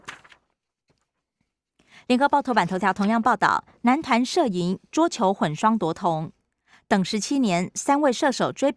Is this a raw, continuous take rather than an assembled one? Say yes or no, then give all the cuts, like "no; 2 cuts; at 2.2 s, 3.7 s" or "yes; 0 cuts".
yes; 0 cuts